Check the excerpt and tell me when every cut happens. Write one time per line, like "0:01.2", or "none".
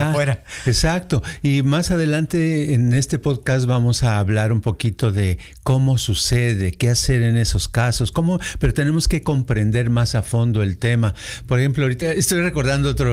0:12.0

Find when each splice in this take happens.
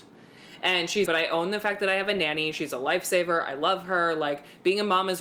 0:01.1

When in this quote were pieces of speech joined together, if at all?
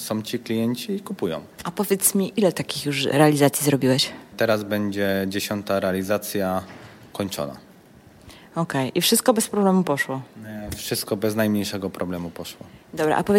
none

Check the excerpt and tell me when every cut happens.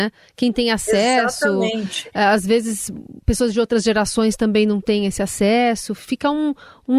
none

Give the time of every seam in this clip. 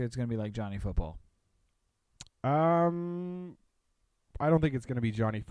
none

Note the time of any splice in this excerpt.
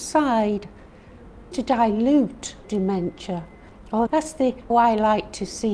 0:01.5
0:02.6
0:04.1
0:04.7

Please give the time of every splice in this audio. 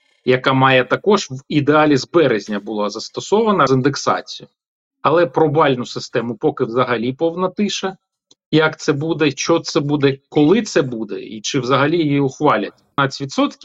0:03.7

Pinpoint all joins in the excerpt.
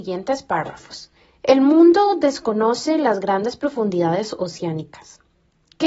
0:01.2

